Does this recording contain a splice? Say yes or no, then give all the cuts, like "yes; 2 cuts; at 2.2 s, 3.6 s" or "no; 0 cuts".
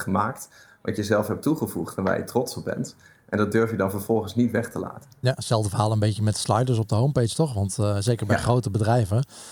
no; 0 cuts